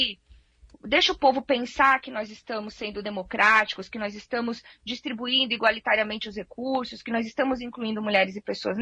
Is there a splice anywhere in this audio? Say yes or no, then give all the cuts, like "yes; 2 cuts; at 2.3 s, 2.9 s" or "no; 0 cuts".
no; 0 cuts